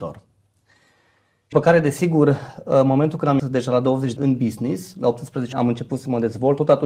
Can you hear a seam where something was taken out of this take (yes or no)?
yes